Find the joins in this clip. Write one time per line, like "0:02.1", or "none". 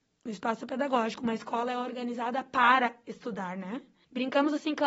none